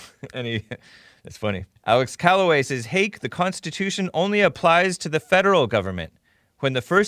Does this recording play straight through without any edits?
no; 1 cut; at 1.8 s

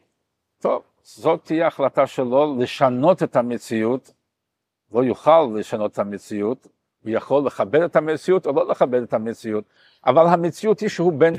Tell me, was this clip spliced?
no; 0 cuts

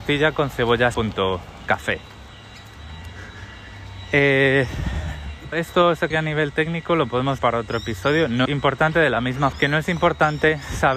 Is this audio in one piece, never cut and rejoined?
no; 7 cuts; at 0.9 s, 1.7 s, 5.5 s, 6.1 s, 7.4 s, 8.5 s, 9.5 s

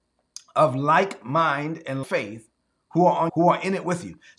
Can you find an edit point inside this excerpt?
yes; 2 cuts; at 2.0 s, 3.3 s

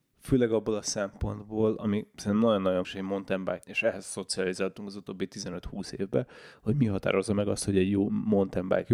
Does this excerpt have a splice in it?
yes; 2 cuts; at 2.8 s, 3.6 s

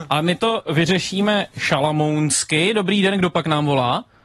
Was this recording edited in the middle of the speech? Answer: no; 0 cuts

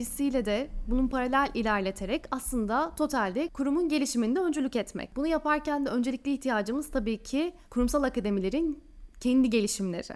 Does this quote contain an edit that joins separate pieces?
yes; 1 cut; at 7.6 s

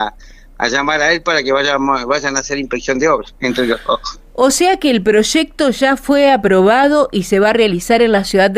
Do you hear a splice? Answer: no; 0 cuts

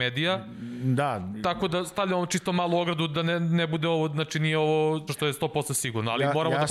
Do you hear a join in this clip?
yes; 1 cut; at 5.1 s

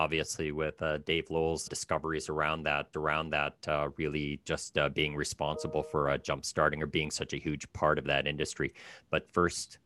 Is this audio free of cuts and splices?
no; 2 cuts; at 1.7 s, 2.9 s

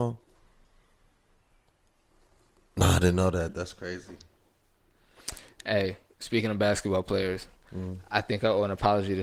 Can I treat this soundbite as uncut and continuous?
yes; 0 cuts

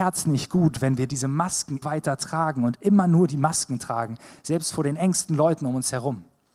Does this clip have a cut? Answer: yes; 1 cut; at 1.8 s

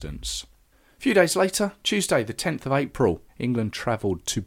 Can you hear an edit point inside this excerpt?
yes; 1 cut; at 3.3 s

